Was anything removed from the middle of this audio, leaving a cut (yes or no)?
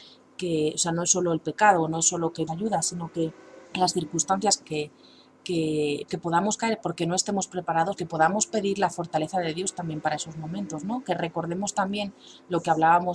yes